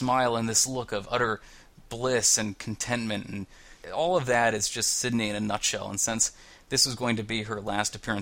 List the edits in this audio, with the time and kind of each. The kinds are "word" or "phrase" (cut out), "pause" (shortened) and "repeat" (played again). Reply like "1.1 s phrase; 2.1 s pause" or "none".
none